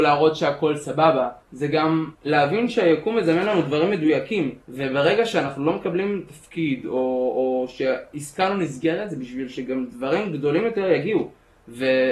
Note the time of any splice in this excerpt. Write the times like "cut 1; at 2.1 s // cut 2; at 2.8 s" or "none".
cut 1; at 1.4 s // cut 2; at 2.1 s // cut 3; at 4.6 s